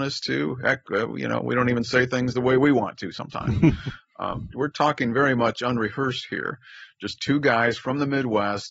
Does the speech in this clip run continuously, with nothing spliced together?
no; 1 cut; at 4.5 s

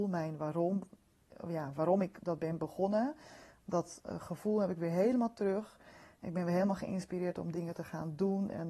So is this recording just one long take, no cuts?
yes; 0 cuts

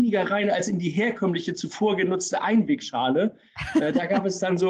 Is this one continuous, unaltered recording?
yes; 0 cuts

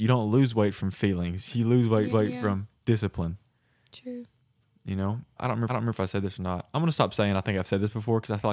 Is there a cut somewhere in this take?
yes; 3 cuts; at 2.1 s, 5.4 s, 5.7 s

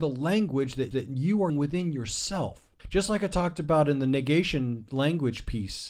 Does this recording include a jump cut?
yes; 3 cuts; at 0.9 s, 1.5 s, 2.8 s

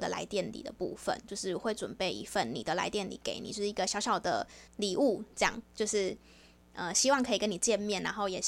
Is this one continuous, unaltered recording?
no; 1 cut; at 4.7 s

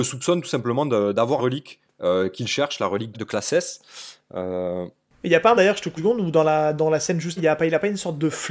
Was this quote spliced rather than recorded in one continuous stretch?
yes; 5 cuts; at 1.4 s, 3.1 s, 5.6 s, 6.0 s, 7.4 s

